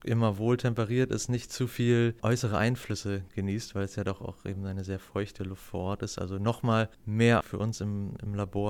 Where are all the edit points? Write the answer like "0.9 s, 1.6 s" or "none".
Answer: 2.2 s, 7.4 s